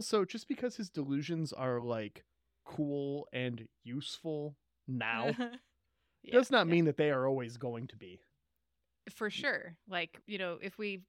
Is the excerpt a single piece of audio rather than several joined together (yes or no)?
yes